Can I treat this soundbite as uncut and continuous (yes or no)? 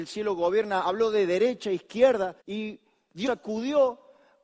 no